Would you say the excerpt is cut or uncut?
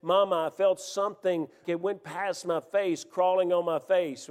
cut